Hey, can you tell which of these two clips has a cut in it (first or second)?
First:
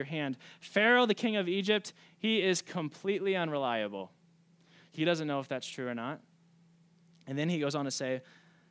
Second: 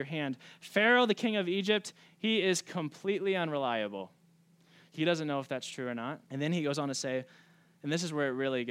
second